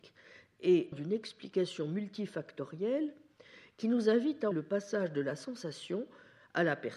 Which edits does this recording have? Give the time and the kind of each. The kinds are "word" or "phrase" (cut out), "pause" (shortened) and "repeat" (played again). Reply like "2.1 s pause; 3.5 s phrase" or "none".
0.9 s word; 4.5 s word